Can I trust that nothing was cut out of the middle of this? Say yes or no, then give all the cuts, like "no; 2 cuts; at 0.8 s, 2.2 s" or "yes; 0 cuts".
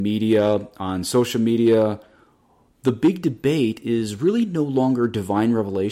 yes; 0 cuts